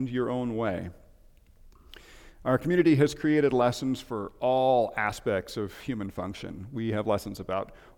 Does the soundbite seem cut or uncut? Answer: uncut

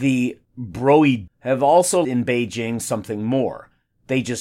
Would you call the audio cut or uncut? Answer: cut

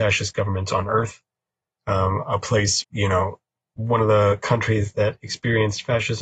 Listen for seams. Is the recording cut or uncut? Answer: cut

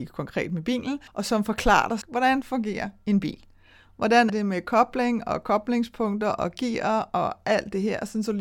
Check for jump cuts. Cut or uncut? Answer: cut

